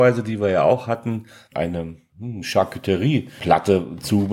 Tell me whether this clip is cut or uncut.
uncut